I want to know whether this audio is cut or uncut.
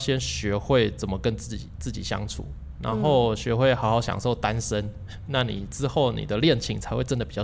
uncut